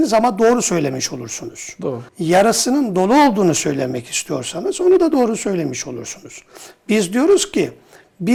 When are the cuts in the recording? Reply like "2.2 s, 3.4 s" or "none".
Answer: 2.1 s